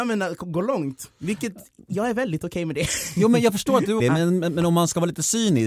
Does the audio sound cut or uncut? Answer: cut